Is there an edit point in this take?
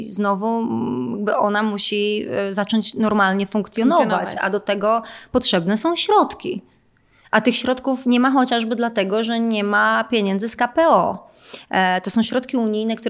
no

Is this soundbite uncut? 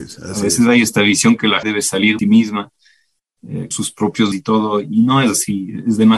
no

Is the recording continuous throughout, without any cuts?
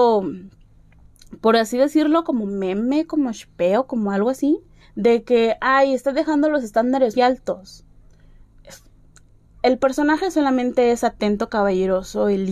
no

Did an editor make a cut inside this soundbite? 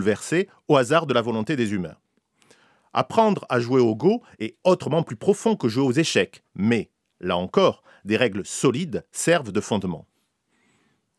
no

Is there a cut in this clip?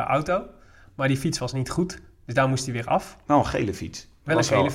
no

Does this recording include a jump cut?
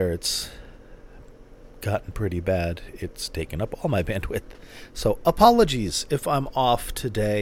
no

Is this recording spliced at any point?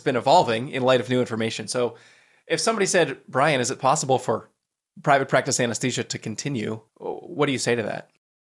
yes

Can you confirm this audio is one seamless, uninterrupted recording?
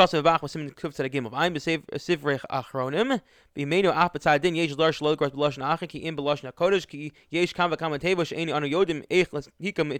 yes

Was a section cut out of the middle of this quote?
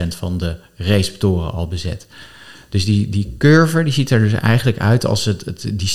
no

